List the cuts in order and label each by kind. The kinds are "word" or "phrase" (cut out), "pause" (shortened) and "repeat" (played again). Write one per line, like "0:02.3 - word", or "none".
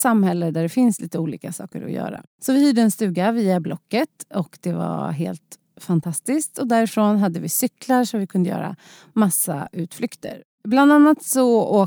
none